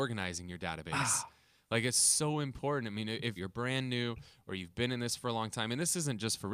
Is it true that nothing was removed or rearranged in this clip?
no; 1 cut; at 3.4 s

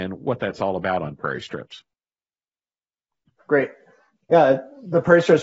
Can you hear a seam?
no; 0 cuts

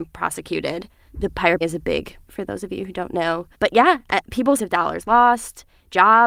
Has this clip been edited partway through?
yes; 4 cuts; at 1.6 s, 2.3 s, 3.5 s, 4.6 s

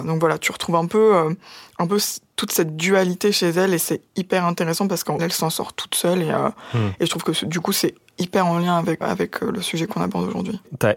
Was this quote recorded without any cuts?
no; 2 cuts; at 5.2 s, 9.0 s

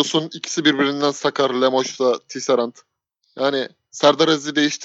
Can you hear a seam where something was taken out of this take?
no; 0 cuts

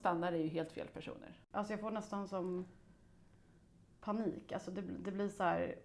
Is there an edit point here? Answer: no; 0 cuts

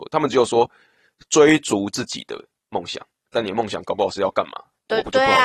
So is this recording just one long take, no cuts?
yes; 0 cuts

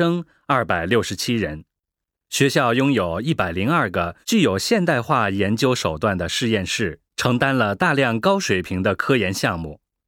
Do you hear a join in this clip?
yes; 3 cuts; at 1.9 s, 4.2 s, 7.1 s

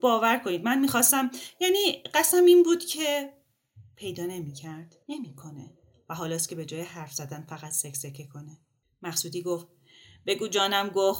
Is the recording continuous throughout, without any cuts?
no; 2 cuts; at 5.0 s, 8.8 s

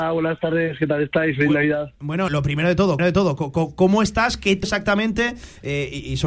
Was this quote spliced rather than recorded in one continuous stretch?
yes; 3 cuts; at 2.3 s, 3.0 s, 4.6 s

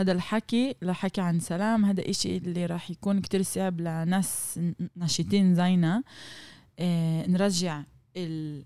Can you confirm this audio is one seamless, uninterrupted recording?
yes; 0 cuts

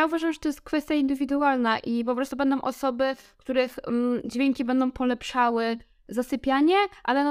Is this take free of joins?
yes; 0 cuts

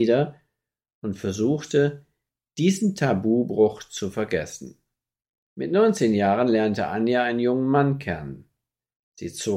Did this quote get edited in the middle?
no; 0 cuts

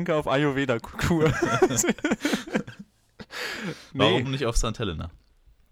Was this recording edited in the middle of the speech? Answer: yes; 1 cut; at 4.2 s

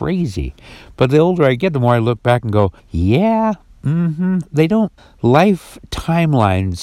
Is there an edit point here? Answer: yes; 2 cuts; at 2.8 s, 5.0 s

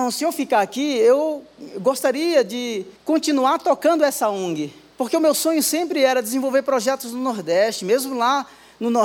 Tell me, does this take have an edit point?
yes; 2 cuts; at 3.0 s, 4.9 s

